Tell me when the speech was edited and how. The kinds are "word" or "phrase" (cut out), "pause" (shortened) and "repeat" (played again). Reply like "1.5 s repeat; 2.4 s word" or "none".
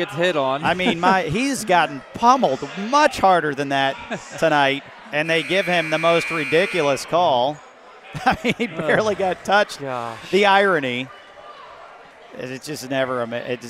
12.1 s pause